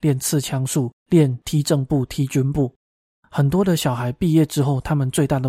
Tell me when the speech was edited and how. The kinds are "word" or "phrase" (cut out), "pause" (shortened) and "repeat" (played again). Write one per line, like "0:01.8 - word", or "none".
0:01.0 - pause